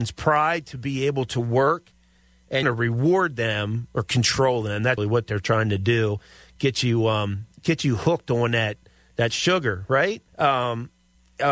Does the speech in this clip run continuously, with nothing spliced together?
no; 3 cuts; at 2.6 s, 5.0 s, 10.3 s

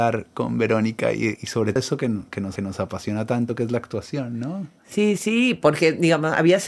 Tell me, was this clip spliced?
yes; 4 cuts; at 1.4 s, 1.8 s, 2.6 s, 5.2 s

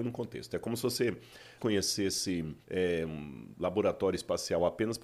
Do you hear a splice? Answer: yes; 2 cuts; at 1.6 s, 2.6 s

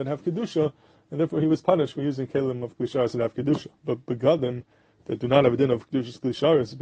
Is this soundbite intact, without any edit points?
yes; 0 cuts

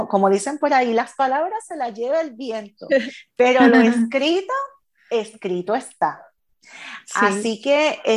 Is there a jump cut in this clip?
no; 0 cuts

